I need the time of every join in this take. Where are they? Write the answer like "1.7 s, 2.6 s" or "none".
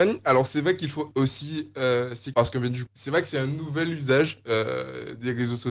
1.1 s, 2.3 s, 2.9 s

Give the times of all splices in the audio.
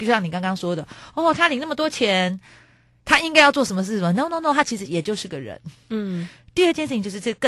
none

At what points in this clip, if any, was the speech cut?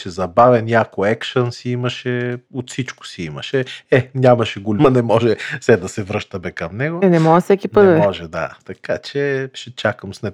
2.4 s, 4.8 s

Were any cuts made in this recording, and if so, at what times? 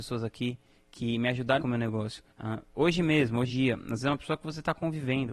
1.6 s, 2.3 s, 3.5 s

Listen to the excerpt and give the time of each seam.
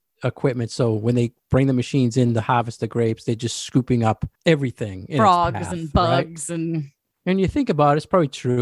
4.4 s

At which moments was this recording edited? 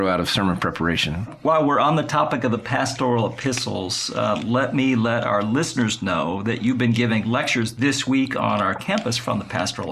none

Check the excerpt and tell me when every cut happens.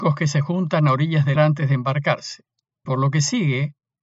1.4 s, 2.9 s

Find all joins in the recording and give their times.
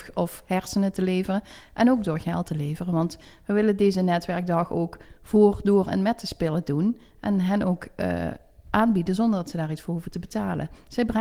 none

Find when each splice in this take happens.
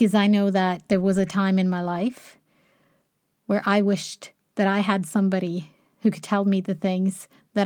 none

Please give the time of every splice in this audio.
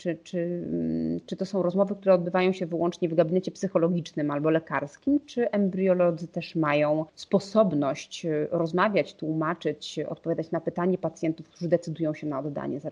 7.1 s

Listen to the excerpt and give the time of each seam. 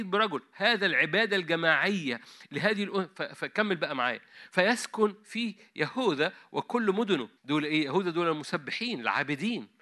7.4 s

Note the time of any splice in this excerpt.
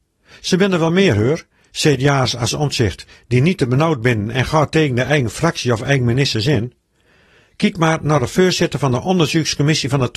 none

